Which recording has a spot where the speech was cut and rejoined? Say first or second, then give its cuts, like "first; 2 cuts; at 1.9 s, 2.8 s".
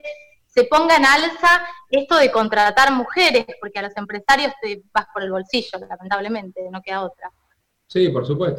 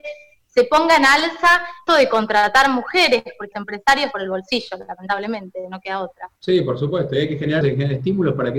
second; 5 cuts; at 1.9 s, 3.5 s, 4.1 s, 6.4 s, 7.6 s